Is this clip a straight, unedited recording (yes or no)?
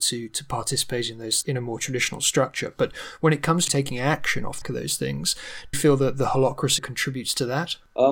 no